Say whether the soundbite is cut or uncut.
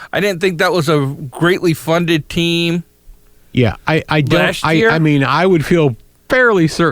uncut